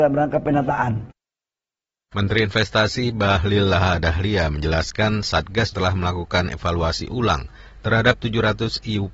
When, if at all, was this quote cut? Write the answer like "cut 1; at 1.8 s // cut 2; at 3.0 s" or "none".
cut 1; at 5.7 s

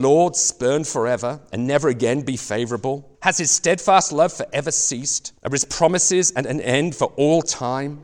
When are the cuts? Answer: cut 1; at 3.1 s // cut 2; at 5.4 s

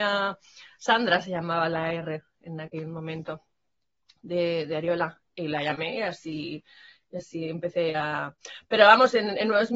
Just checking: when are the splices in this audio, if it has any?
none

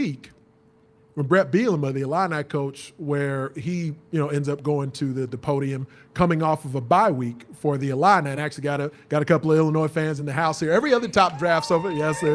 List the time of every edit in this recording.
none

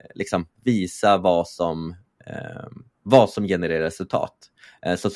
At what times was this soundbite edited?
none

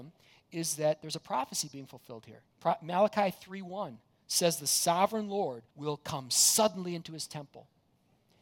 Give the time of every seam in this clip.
cut 1; at 2.5 s // cut 2; at 5.7 s

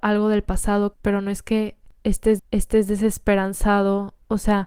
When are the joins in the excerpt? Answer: cut 1; at 0.9 s // cut 2; at 2.4 s

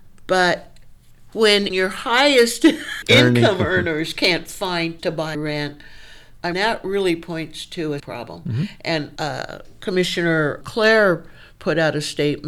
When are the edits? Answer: cut 1; at 1.7 s // cut 2; at 3.0 s // cut 3; at 5.0 s // cut 4; at 5.3 s // cut 5; at 6.5 s // cut 6; at 8.0 s // cut 7; at 9.2 s // cut 8; at 10.6 s

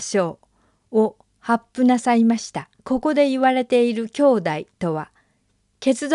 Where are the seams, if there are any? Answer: cut 1; at 2.8 s

